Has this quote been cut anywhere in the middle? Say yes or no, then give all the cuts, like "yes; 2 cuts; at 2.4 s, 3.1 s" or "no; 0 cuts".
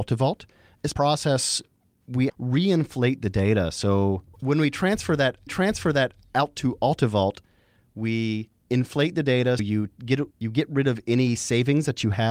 yes; 6 cuts; at 0.9 s, 2.3 s, 5.5 s, 8.6 s, 9.6 s, 10.3 s